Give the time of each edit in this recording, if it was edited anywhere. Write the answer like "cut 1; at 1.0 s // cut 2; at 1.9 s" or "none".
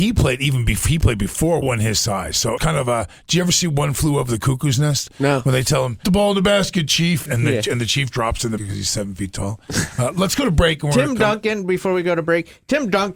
cut 1; at 1.6 s // cut 2; at 2.6 s // cut 3; at 6.0 s // cut 4; at 7.3 s // cut 5; at 8.1 s // cut 6; at 8.6 s